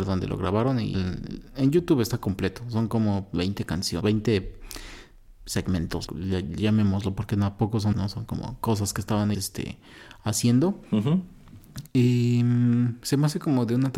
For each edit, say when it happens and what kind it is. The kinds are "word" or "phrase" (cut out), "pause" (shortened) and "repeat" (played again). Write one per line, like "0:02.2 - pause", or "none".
0:00.9 - word
0:04.0 - word
0:06.1 - word
0:07.9 - word
0:09.3 - word

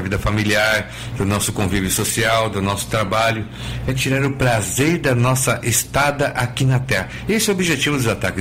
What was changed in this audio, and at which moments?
none

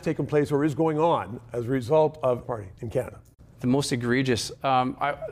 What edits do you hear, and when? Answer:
0:02.4 - phrase
0:02.8 - pause

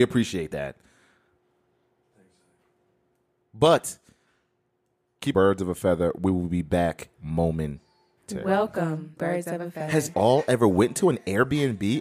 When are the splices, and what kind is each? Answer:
0:05.3 - phrase
0:07.1 - pause
0:09.2 - word
0:10.1 - phrase

